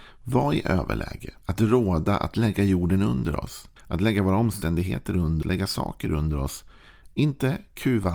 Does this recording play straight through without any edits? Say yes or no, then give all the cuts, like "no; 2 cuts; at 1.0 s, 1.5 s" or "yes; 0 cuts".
no; 3 cuts; at 1.4 s, 3.8 s, 5.4 s